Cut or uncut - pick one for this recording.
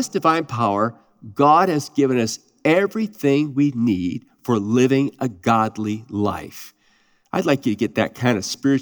uncut